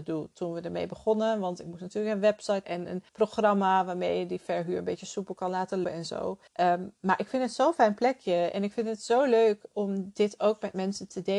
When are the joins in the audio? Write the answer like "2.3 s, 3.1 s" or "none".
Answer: 2.6 s, 3.1 s, 5.8 s, 6.5 s